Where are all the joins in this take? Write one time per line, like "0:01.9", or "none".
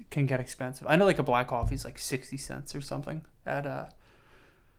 none